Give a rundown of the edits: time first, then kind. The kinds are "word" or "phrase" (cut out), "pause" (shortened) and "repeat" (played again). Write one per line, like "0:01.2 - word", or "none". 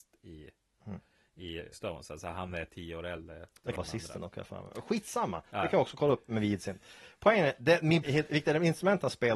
0:01.7 - word
0:03.8 - word
0:08.0 - word